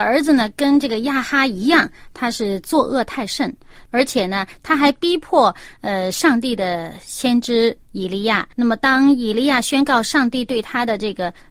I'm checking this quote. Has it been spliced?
yes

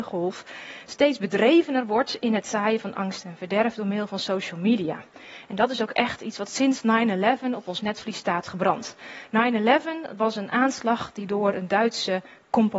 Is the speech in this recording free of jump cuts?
yes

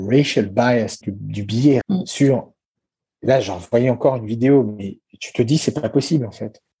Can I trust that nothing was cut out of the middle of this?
no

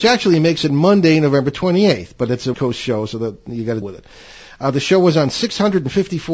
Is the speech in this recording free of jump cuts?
no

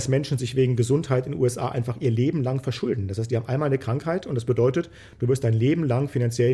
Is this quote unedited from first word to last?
yes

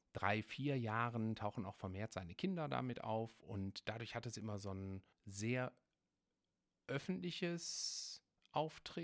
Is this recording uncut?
no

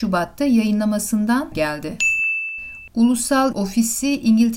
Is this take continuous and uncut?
no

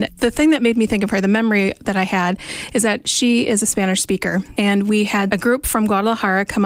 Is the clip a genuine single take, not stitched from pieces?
yes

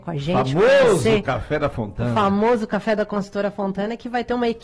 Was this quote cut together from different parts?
no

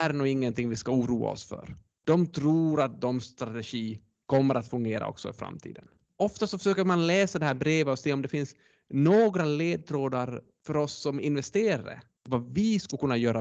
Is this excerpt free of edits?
yes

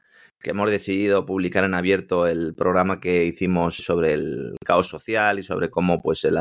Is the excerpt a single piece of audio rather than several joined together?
no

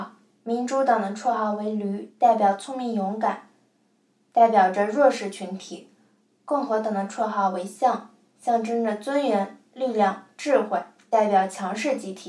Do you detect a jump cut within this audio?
no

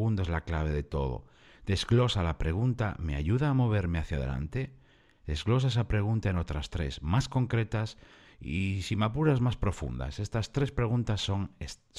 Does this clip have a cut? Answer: no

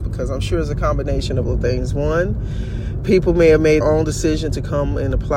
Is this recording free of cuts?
no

